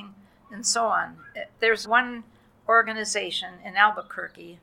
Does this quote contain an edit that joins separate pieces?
yes; 1 cut; at 1.8 s

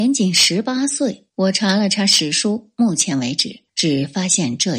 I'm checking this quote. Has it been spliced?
yes; 2 cuts; at 1.3 s, 3.7 s

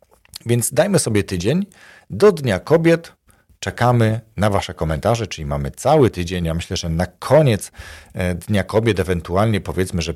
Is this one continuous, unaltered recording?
yes; 0 cuts

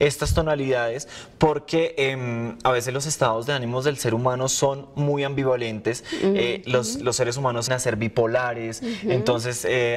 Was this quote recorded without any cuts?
no; 1 cut; at 7.7 s

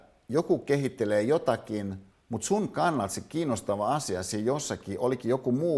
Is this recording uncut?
no; 1 cut; at 2.1 s

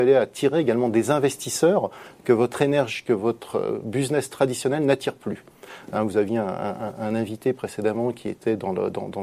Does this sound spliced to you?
no; 0 cuts

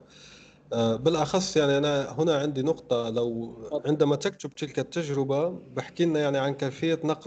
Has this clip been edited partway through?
no; 0 cuts

